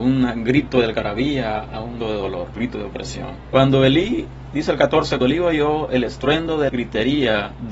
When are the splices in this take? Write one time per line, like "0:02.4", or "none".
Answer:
0:02.0
0:02.6
0:05.2
0:06.7